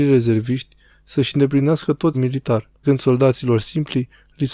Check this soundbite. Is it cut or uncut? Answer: cut